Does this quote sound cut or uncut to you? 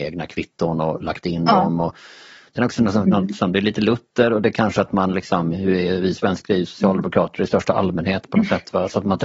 uncut